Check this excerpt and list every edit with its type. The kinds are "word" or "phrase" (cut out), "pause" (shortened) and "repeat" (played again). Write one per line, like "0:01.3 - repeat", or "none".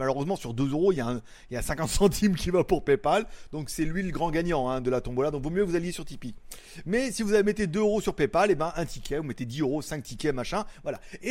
none